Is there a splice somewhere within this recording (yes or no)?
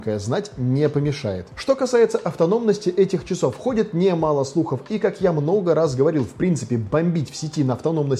no